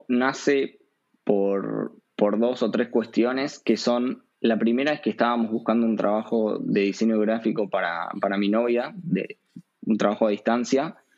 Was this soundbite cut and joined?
yes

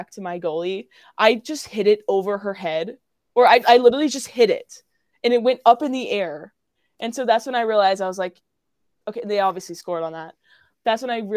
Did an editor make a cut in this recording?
no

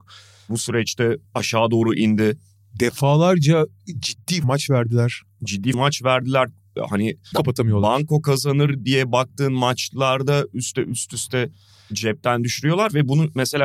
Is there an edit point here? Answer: yes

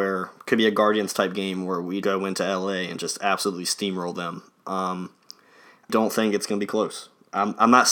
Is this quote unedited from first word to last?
no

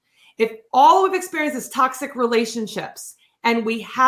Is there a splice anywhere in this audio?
no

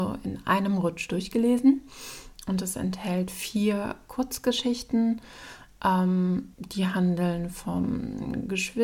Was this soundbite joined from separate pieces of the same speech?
yes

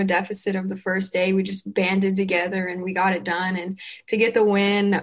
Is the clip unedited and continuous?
yes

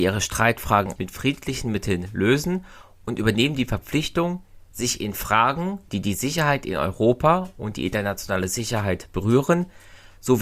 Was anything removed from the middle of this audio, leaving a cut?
yes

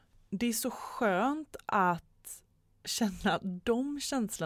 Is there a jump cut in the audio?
no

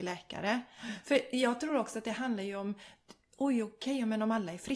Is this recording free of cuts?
yes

